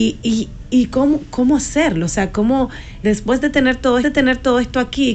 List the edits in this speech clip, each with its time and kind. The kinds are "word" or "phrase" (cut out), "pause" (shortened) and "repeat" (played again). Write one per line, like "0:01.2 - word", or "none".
0:03.0 - word
0:04.0 - repeat